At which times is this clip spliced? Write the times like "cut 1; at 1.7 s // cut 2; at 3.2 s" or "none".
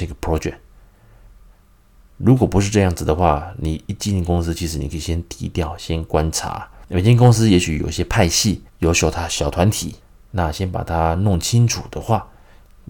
cut 1; at 8.7 s